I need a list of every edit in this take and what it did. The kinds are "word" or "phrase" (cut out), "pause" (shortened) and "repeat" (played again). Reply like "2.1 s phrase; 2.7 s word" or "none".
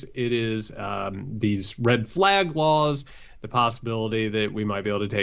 none